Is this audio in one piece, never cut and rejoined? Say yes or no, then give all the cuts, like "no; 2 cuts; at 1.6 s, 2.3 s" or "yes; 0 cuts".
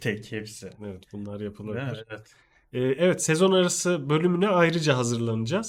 yes; 0 cuts